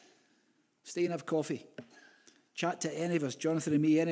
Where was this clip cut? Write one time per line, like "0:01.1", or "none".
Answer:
none